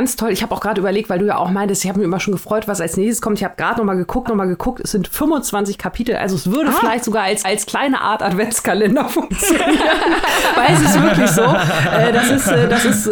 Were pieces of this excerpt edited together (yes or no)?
yes